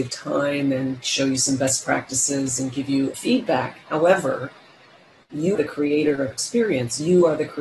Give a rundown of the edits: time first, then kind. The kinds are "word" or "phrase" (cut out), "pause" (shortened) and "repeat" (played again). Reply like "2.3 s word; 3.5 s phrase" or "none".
3.1 s word; 5.6 s word; 6.3 s word